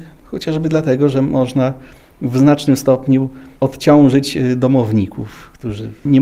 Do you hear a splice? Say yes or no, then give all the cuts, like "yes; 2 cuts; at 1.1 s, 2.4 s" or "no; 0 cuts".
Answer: no; 0 cuts